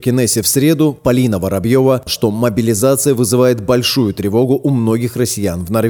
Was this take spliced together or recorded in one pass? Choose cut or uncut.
cut